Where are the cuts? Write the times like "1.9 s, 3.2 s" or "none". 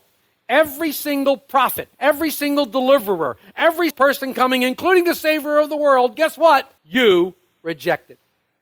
1.9 s, 3.9 s, 6.8 s